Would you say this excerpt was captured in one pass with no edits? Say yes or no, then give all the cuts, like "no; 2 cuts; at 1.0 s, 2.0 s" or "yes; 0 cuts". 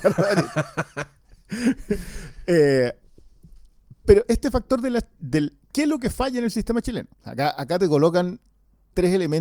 no; 2 cuts; at 5.6 s, 7.1 s